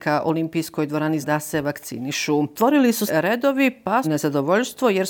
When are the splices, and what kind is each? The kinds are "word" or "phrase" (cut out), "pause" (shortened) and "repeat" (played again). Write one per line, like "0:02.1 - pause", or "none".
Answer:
0:01.2 - word
0:03.1 - word
0:04.0 - phrase